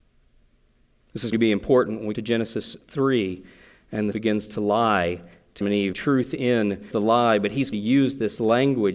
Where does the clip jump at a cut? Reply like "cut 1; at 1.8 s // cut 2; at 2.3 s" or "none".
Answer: cut 1; at 1.3 s // cut 2; at 2.1 s // cut 3; at 4.1 s // cut 4; at 5.6 s // cut 5; at 5.9 s // cut 6; at 6.9 s // cut 7; at 7.7 s